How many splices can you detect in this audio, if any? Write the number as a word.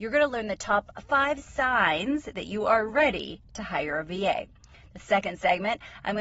zero